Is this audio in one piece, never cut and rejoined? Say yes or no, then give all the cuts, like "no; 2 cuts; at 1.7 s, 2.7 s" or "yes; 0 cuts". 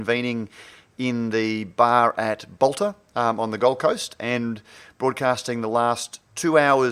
yes; 0 cuts